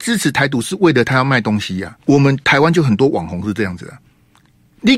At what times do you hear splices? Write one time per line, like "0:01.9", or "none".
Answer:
0:02.0